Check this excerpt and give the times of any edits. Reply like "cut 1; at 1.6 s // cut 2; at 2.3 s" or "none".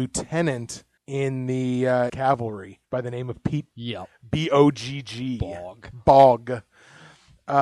cut 1; at 1.0 s // cut 2; at 2.1 s // cut 3; at 2.8 s // cut 4; at 3.7 s